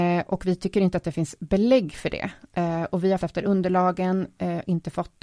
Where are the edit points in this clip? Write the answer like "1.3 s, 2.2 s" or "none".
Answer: 1.4 s, 3.2 s